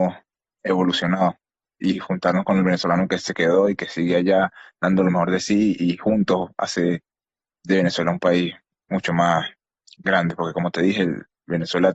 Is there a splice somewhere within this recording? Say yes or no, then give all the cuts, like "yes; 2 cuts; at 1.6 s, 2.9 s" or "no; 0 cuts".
no; 0 cuts